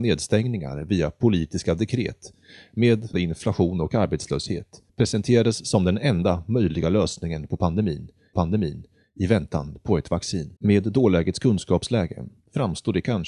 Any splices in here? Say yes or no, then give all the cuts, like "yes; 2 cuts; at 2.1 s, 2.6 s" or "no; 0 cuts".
yes; 4 cuts; at 3.1 s, 4.9 s, 8.3 s, 10.6 s